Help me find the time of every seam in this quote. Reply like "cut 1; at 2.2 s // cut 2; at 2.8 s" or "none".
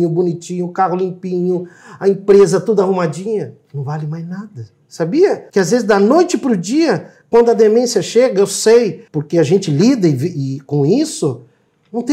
cut 1; at 5.5 s // cut 2; at 9.1 s